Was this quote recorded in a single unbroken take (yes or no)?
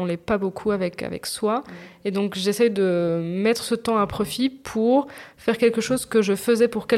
yes